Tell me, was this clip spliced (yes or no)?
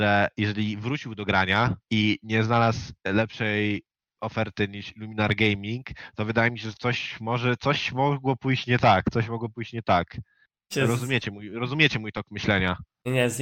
yes